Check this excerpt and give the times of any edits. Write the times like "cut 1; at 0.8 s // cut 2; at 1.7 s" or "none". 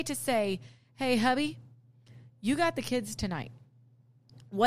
none